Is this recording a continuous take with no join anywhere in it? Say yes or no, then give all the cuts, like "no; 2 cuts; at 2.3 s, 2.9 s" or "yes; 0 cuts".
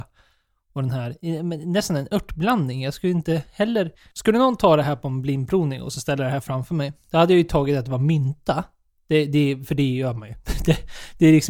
yes; 0 cuts